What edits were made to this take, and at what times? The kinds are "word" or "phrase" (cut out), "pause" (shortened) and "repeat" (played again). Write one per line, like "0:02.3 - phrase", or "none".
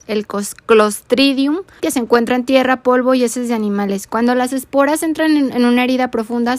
0:01.8 - word